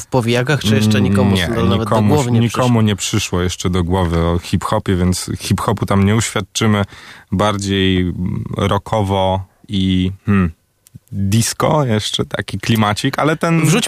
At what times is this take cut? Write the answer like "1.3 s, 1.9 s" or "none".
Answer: 10.2 s